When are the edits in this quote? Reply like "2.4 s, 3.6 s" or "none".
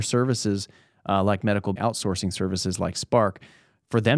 1.8 s

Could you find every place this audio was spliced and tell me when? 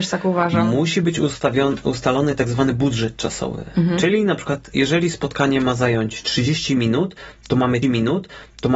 7.8 s

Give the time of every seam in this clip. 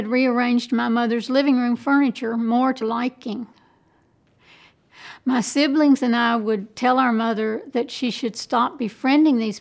2.8 s

